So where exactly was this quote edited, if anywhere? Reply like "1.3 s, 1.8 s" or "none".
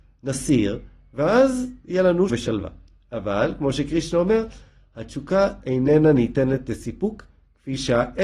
2.3 s